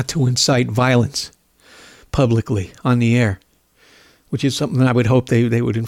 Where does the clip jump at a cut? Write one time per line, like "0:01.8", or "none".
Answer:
none